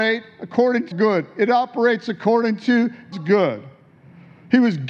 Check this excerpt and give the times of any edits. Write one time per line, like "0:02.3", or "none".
0:00.9
0:03.1